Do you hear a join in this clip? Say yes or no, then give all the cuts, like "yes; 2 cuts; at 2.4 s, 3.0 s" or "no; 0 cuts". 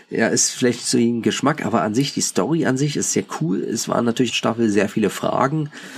yes; 1 cut; at 4.3 s